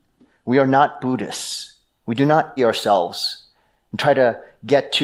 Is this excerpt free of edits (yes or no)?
no